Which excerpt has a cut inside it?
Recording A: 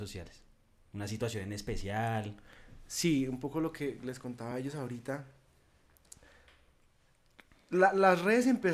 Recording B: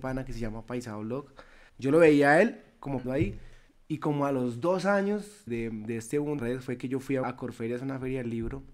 B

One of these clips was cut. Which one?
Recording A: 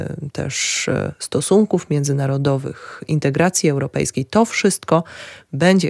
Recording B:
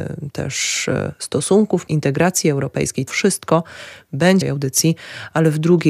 B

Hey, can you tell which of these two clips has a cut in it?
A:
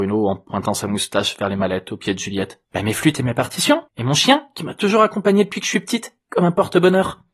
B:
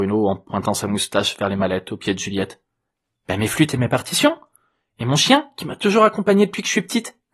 A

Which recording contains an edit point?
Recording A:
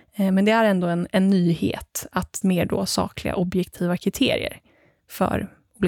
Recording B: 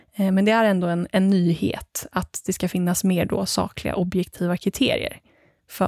A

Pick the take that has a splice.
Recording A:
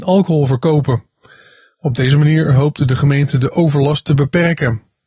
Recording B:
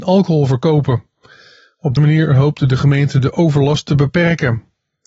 B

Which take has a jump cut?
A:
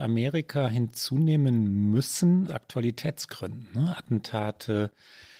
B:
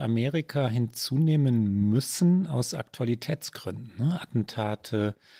A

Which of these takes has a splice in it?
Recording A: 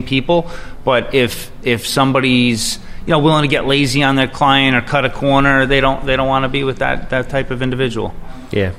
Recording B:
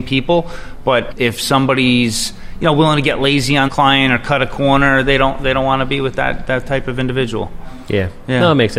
B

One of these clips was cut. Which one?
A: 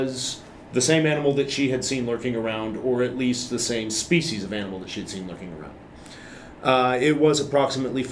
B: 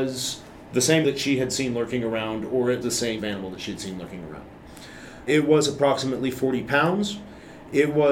B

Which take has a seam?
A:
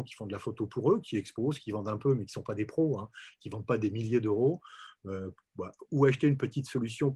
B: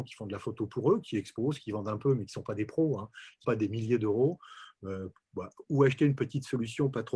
B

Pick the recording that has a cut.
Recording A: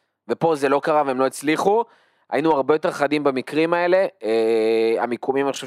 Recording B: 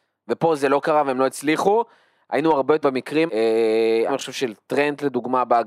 B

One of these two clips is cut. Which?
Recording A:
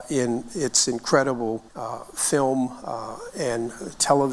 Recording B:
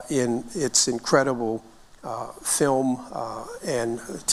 A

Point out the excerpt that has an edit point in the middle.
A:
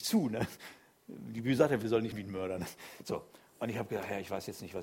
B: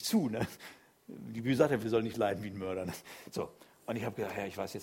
A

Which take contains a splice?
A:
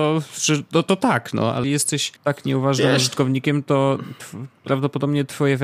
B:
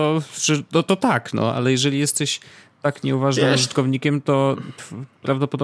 A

